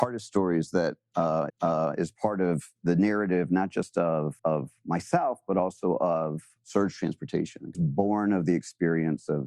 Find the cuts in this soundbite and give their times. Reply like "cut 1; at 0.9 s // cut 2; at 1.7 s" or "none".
cut 1; at 1.5 s // cut 2; at 4.4 s // cut 3; at 7.7 s